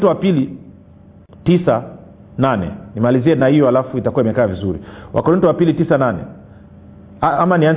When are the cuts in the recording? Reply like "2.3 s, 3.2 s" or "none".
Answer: none